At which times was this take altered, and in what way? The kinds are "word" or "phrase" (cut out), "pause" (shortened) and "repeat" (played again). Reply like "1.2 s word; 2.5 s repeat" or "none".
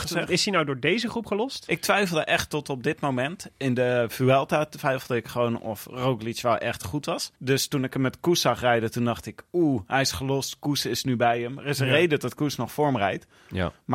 7.3 s pause

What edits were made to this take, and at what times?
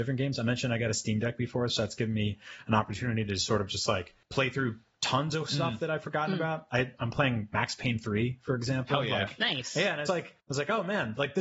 4.2 s pause; 10.1 s word; 10.4 s pause

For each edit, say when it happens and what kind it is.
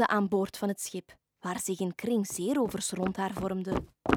1.2 s pause

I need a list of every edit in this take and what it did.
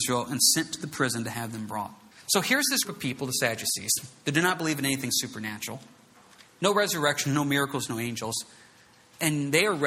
2.1 s pause; 2.8 s word

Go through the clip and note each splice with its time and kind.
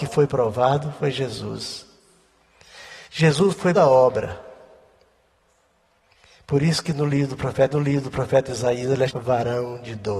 3.1 s pause; 3.7 s phrase; 7.7 s repeat; 9.1 s word

